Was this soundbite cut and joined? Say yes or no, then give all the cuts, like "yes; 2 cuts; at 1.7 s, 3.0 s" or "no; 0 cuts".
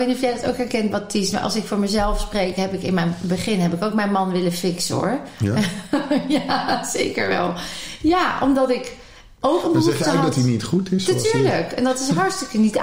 no; 0 cuts